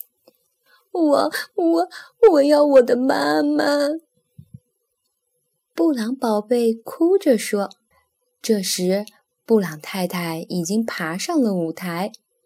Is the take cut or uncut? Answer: cut